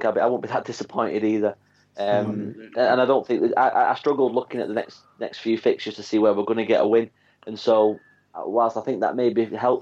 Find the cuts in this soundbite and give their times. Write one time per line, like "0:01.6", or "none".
none